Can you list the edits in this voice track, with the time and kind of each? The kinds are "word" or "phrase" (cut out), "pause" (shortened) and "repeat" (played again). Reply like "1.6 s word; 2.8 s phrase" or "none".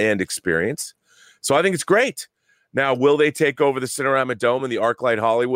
none

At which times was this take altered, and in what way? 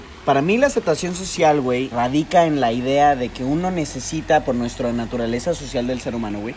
1.9 s word

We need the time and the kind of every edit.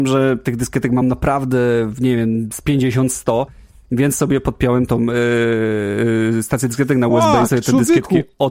none

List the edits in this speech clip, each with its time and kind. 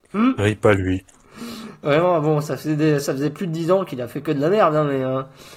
none

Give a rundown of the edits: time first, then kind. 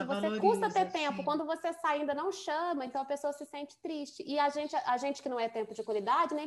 none

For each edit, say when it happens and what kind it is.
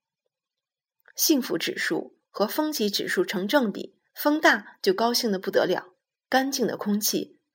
4.1 s pause; 6.0 s pause

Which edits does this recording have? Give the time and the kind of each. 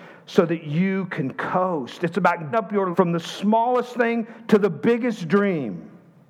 2.5 s word; 2.9 s word

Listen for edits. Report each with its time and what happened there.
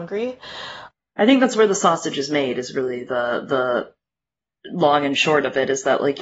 none

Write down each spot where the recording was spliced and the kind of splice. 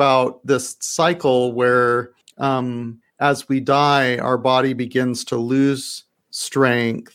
none

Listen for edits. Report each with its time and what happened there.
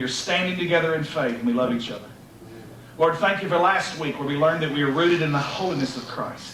none

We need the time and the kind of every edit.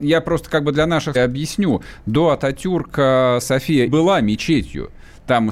1.1 s word; 3.4 s word; 3.9 s word

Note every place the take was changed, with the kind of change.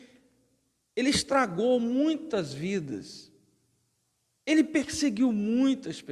none

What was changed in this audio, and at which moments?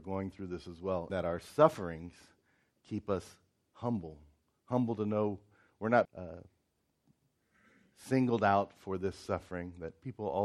1.1 s word; 6.0 s word

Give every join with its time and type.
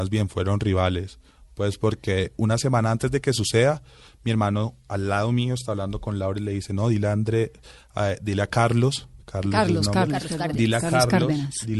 none

